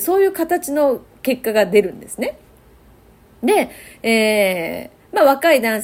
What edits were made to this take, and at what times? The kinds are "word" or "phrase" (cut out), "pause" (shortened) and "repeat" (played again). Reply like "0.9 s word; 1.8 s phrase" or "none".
none